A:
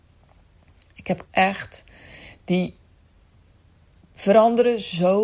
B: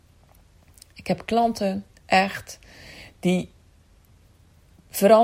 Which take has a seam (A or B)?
A